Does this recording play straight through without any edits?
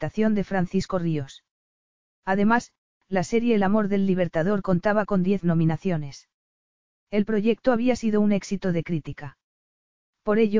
yes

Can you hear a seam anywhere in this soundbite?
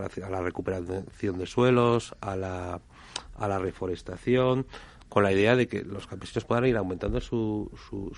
no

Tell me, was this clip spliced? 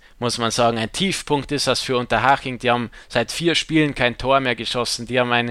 no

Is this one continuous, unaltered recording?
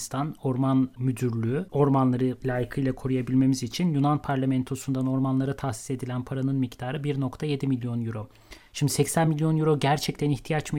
yes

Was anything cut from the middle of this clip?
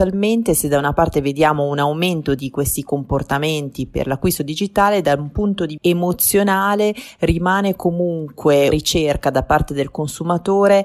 yes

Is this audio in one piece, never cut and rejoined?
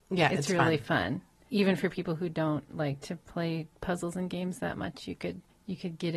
yes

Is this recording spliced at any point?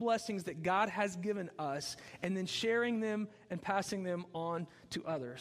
no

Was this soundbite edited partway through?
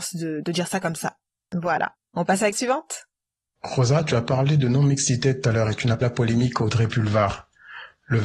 yes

